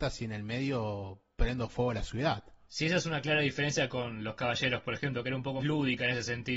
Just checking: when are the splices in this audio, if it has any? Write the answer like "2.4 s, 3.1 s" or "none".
5.6 s